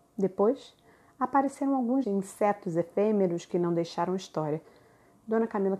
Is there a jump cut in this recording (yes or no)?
yes